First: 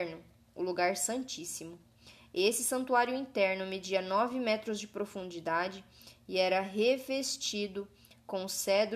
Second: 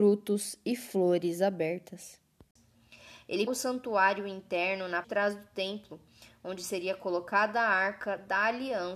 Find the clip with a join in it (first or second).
second